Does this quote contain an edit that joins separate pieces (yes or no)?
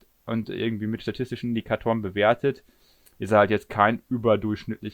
no